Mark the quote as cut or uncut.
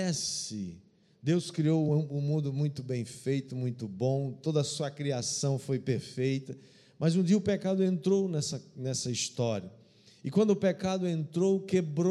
uncut